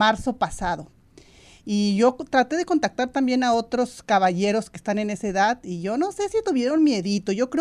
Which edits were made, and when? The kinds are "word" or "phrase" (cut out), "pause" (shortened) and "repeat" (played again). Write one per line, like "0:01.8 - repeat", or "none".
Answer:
none